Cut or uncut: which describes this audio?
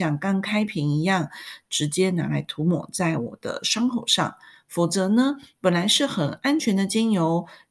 uncut